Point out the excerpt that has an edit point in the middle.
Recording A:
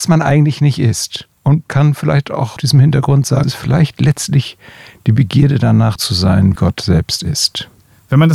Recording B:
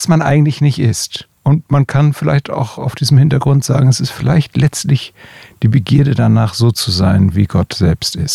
A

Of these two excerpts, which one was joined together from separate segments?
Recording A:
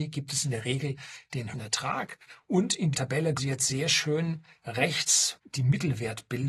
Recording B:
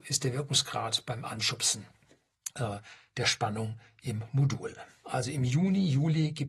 A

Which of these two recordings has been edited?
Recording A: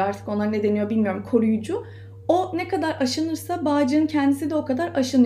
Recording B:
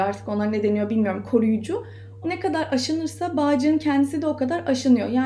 B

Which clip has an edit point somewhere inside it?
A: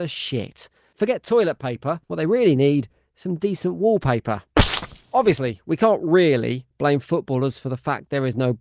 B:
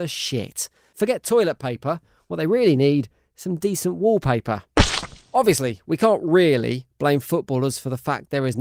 A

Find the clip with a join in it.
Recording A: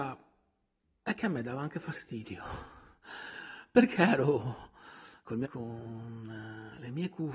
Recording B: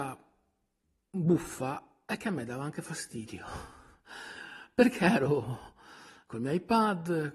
A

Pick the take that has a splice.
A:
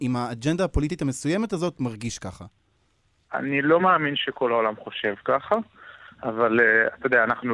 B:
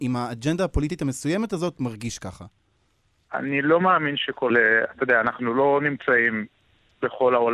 B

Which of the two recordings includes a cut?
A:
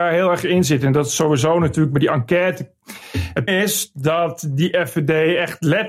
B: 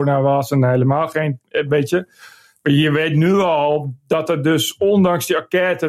A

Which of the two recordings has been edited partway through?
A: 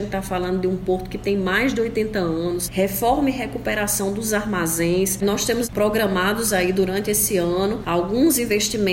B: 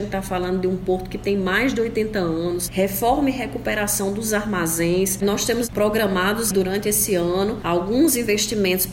B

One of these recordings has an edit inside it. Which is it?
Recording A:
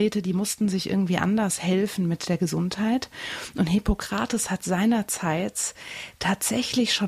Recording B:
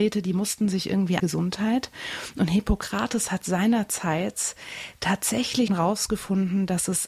B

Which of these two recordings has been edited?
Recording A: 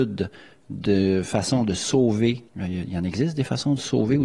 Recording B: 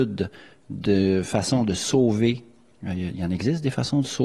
A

